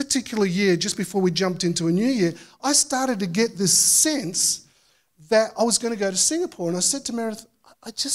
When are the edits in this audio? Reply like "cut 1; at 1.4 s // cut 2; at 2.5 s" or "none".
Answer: none